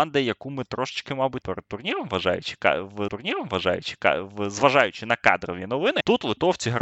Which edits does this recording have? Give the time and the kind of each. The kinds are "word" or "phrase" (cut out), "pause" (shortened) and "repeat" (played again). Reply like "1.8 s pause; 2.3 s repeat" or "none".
1.4 s word; 3.1 s repeat

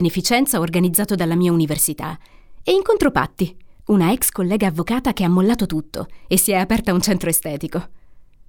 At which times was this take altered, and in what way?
none

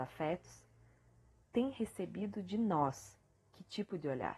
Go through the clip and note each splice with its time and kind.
none

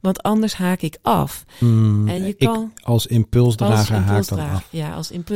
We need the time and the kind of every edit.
none

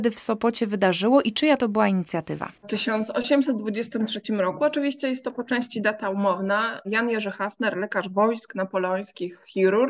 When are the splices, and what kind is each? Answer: 2.6 s pause

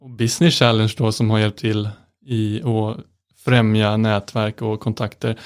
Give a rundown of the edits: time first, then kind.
none

